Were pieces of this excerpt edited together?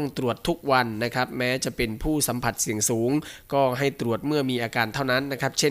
no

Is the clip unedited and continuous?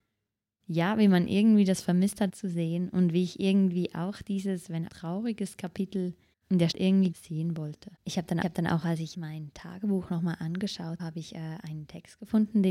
no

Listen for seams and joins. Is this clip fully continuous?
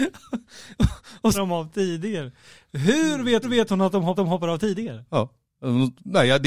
no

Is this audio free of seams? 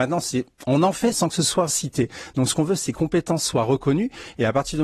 no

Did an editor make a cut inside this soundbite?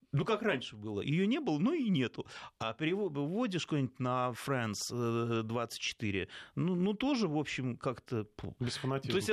no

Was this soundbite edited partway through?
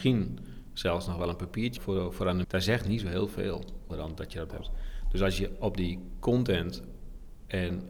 yes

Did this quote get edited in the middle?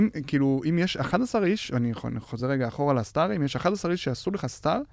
no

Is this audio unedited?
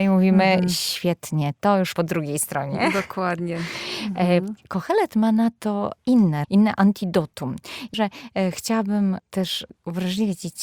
no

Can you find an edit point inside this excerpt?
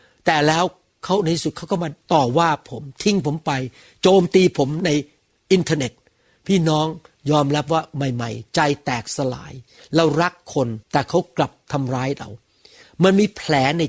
yes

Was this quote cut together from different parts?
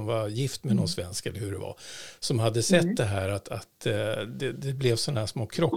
no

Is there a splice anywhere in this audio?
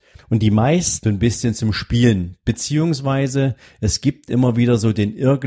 yes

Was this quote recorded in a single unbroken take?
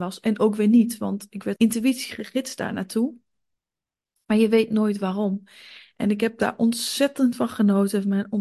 no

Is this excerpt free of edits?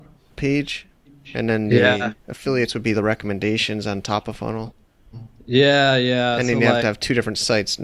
yes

